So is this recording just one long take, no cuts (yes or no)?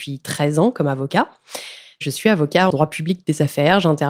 no